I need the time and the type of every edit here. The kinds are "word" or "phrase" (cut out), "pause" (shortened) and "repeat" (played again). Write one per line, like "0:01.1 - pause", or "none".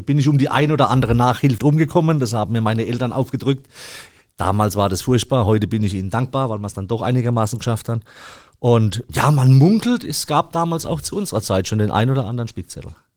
0:01.6 - word